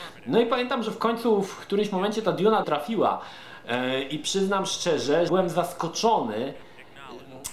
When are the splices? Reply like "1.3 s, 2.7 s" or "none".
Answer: 2.6 s, 5.3 s

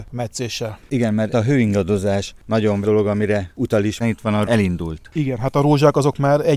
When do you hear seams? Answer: 1.3 s, 2.8 s, 4.0 s, 4.4 s

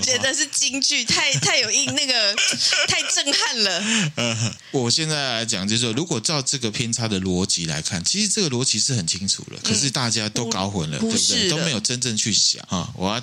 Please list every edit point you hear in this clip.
11.0 s

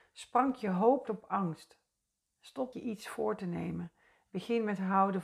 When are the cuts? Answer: 1.1 s, 2.7 s

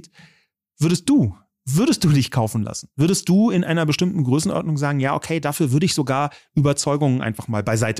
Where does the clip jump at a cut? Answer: none

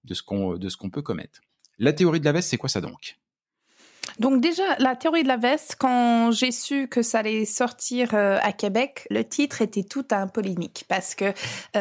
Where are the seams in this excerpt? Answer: 9.1 s

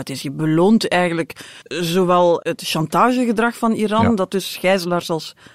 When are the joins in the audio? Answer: 1.6 s

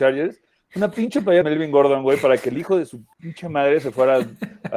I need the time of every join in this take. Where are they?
1.4 s, 3.1 s

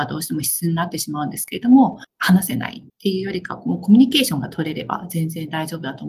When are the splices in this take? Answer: 2.9 s

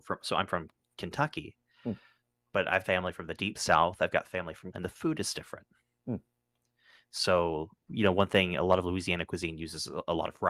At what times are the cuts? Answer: 2.8 s, 4.7 s, 7.9 s

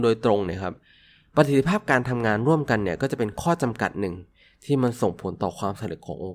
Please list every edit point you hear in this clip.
none

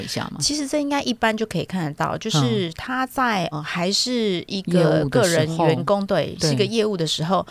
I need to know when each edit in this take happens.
3.5 s

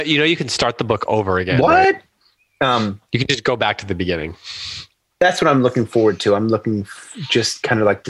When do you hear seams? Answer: none

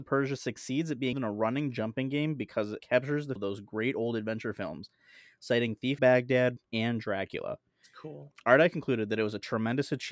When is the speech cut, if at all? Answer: 1.1 s, 2.8 s, 3.4 s, 6.0 s, 6.6 s

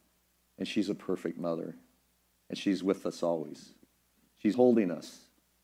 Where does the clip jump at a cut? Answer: 4.5 s

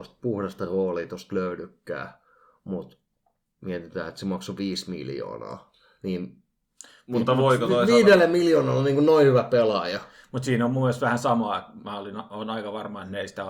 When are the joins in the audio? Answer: none

